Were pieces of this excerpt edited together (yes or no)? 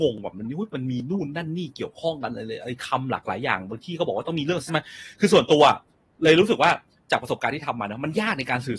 yes